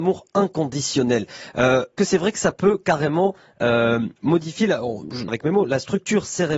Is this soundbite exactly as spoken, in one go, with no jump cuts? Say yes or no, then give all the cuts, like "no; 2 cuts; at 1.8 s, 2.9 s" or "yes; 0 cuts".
no; 3 cuts; at 2.0 s, 4.2 s, 5.3 s